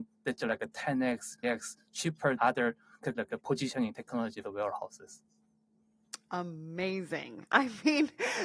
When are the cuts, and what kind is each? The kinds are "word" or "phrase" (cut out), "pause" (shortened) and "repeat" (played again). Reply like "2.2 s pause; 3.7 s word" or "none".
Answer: 1.4 s word; 2.4 s word; 3.1 s word; 4.4 s word